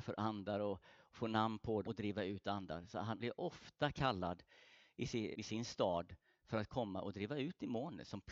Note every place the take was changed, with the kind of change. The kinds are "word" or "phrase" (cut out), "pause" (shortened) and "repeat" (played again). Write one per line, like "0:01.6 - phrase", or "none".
0:01.8 - word
0:03.2 - word
0:05.3 - word